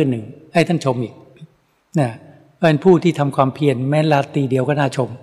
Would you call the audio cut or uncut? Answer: uncut